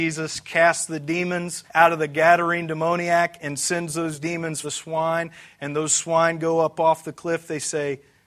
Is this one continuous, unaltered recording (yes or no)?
no